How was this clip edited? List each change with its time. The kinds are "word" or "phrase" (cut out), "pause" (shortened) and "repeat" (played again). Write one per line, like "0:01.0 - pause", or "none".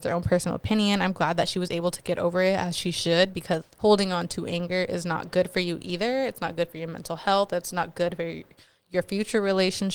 0:03.6 - word